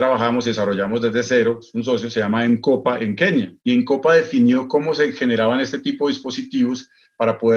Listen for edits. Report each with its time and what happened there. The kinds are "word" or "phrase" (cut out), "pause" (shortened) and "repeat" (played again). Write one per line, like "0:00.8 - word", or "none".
0:03.6 - pause